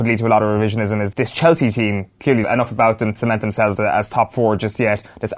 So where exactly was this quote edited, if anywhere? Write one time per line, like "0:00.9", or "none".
0:01.1
0:02.4
0:03.2